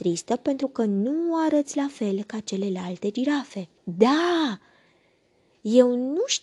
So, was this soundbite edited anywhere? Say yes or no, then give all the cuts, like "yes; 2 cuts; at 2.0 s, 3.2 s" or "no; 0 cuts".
yes; 1 cut; at 3.8 s